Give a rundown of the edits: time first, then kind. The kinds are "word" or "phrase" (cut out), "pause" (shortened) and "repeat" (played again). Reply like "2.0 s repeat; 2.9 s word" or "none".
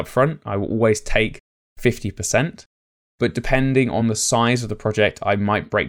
none